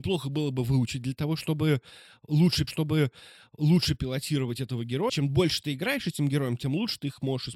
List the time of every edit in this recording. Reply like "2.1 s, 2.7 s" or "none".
2.7 s, 5.1 s